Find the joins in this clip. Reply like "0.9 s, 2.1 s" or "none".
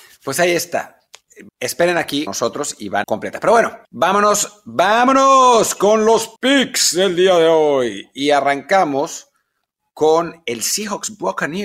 1.5 s, 2.3 s, 3.0 s, 3.8 s, 6.4 s

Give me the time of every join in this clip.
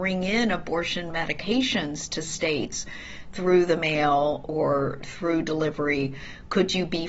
none

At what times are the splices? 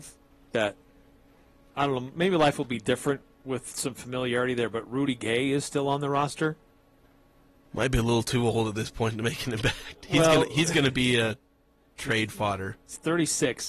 3.3 s

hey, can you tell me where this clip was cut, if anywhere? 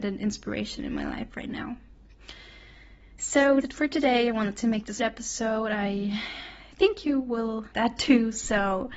3.6 s, 5.0 s, 7.7 s

